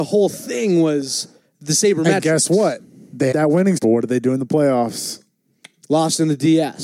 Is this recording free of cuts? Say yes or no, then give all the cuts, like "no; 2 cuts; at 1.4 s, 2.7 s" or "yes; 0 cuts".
no; 2 cuts; at 3.3 s, 3.8 s